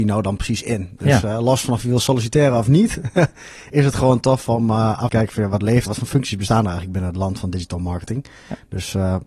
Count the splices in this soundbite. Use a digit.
2